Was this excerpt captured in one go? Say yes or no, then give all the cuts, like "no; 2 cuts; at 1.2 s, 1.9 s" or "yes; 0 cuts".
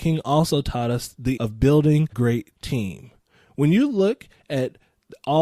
no; 2 cuts; at 1.4 s, 2.1 s